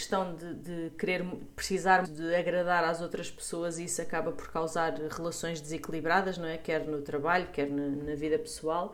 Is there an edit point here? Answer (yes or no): yes